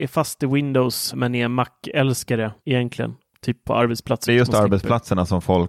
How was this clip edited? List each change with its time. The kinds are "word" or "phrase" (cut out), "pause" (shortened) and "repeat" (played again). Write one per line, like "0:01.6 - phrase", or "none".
0:01.1 - word
0:02.6 - pause
0:04.3 - phrase